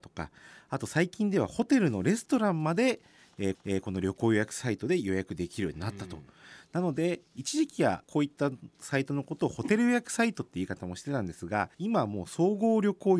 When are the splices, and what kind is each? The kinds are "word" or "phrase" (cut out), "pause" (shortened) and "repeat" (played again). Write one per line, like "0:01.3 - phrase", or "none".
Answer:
0:03.5 - repeat
0:08.0 - pause
0:11.7 - pause